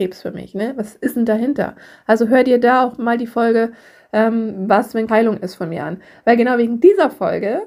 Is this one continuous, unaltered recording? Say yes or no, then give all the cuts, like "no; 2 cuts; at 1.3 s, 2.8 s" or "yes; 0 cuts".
no; 1 cut; at 5.1 s